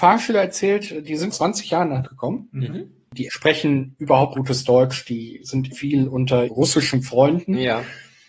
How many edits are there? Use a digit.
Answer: 6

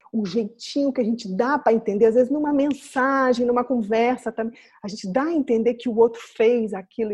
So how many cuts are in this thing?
0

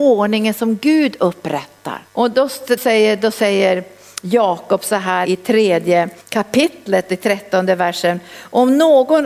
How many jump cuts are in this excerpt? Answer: 4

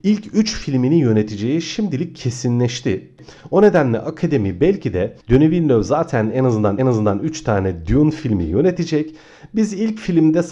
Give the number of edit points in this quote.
2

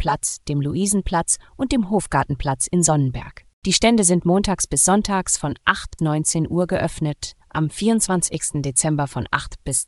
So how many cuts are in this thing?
3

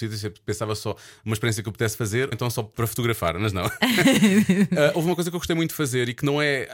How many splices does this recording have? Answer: 1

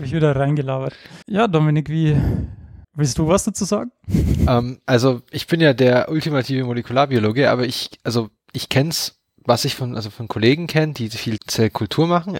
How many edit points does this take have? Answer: 3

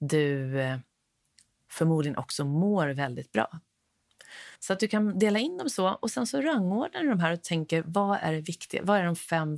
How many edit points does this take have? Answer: 1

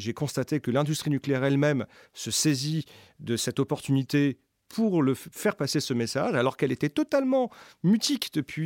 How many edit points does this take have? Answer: 0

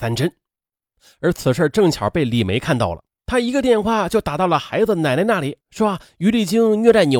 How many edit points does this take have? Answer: 2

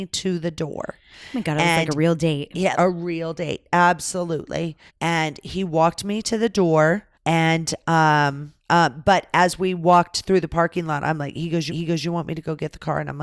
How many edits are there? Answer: 5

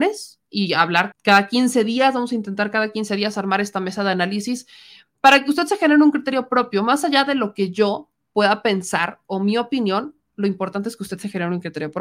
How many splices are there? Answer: 1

